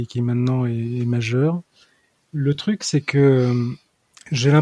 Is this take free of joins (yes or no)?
yes